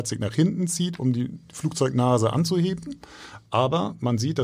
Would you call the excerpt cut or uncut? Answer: uncut